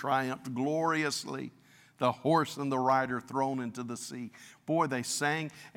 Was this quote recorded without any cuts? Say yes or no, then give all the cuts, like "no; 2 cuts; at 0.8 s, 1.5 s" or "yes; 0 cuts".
yes; 0 cuts